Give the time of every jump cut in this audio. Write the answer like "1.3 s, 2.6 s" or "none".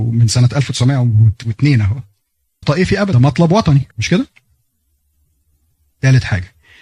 2.6 s, 3.1 s, 3.9 s